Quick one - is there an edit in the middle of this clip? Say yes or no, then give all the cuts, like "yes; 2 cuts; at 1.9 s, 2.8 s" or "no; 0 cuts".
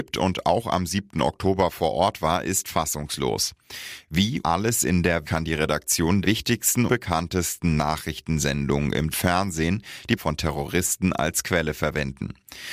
yes; 6 cuts; at 4.4 s, 5.2 s, 6.2 s, 6.9 s, 9.1 s, 10.2 s